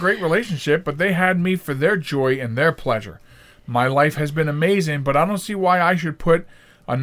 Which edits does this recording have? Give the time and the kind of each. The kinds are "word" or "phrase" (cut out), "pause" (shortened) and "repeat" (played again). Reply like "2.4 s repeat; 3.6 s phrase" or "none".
none